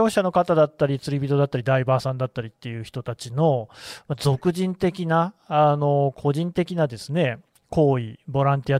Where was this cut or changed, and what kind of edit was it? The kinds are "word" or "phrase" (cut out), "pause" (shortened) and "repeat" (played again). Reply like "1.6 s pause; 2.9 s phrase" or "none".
none